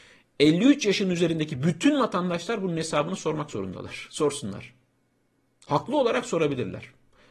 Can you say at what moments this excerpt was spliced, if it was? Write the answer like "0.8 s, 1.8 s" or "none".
none